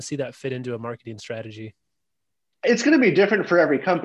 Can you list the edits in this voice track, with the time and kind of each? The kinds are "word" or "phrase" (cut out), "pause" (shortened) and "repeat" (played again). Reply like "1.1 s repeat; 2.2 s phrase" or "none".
none